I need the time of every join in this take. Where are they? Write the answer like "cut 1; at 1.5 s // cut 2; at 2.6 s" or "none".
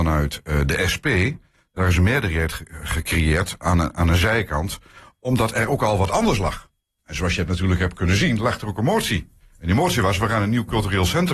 none